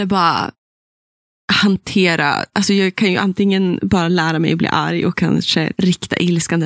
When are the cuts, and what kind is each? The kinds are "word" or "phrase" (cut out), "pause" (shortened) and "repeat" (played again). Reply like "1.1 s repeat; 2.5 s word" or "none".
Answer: 5.7 s word